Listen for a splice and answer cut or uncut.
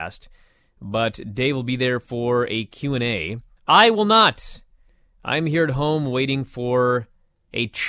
uncut